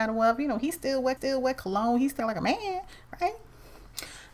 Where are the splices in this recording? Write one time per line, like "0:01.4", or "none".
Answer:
0:01.2
0:02.2